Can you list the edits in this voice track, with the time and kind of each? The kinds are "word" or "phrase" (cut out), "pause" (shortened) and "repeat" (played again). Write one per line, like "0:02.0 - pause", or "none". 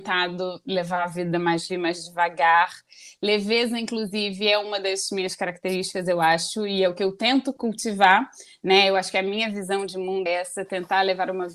0:01.7 - word
0:10.3 - word

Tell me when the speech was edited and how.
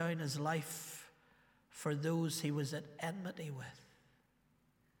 none

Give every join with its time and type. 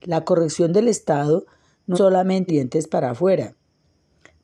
0:01.9 - word
0:02.5 - word

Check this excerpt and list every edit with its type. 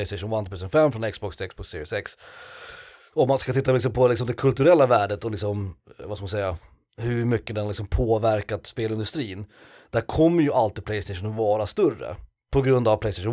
none

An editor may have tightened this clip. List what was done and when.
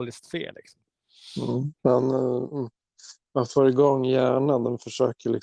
0:01.8 - pause

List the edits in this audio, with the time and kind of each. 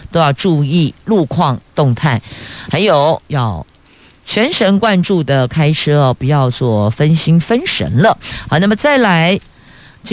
none

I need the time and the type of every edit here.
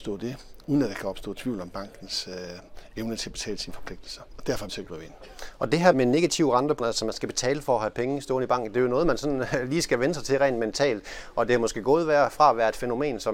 0:04.7 - word
0:05.9 - word
0:06.8 - word

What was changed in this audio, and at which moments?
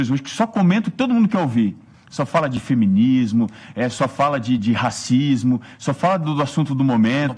0:04.6 - word

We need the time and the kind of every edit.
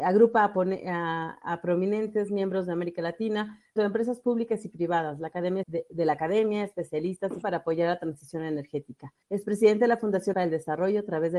0:03.8 - word
0:05.6 - word
0:07.4 - phrase
0:09.2 - pause
0:10.3 - word

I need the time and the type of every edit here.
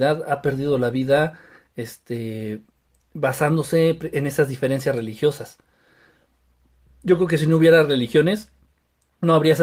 none

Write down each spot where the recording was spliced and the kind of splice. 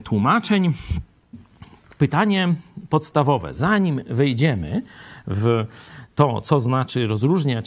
none

